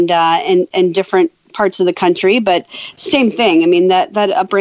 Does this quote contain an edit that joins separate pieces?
no; 0 cuts

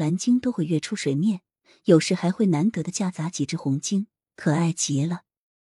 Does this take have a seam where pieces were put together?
no; 0 cuts

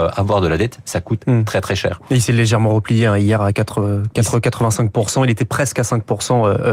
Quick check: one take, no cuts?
yes; 0 cuts

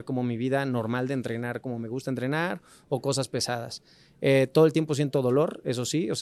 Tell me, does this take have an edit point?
no; 0 cuts

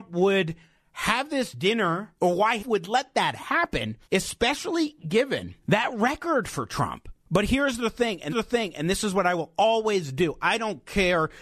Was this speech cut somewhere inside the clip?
yes; 6 cuts; at 2.2 s, 2.6 s, 4.0 s, 5.6 s, 7.2 s, 8.3 s

